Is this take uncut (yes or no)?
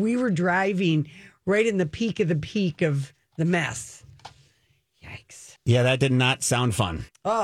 no